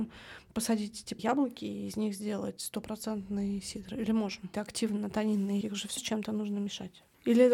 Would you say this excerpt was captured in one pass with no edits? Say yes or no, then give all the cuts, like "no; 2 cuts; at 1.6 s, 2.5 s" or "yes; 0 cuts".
no; 4 cuts; at 1.2 s, 4.5 s, 5.6 s, 6.0 s